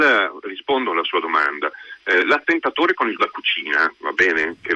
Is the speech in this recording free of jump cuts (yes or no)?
no